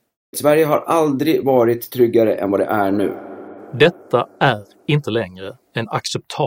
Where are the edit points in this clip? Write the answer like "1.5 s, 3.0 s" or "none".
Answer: none